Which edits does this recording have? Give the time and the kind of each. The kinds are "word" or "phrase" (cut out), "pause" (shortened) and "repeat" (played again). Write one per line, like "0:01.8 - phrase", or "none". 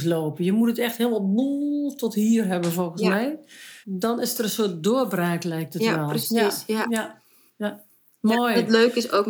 0:03.8 - pause